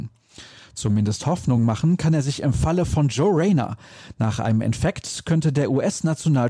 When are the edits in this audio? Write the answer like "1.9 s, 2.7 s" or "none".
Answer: none